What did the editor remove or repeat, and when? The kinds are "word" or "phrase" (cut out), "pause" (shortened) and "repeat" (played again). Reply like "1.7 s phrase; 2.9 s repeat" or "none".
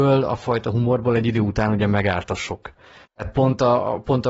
none